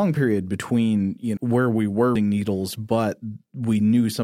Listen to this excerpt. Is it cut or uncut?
cut